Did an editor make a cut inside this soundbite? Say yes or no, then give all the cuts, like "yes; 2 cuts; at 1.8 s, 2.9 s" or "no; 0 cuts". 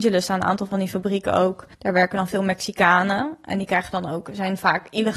yes; 1 cut; at 1.7 s